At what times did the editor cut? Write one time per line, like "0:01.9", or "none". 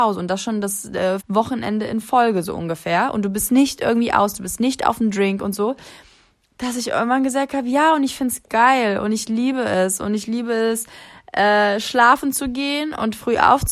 0:01.2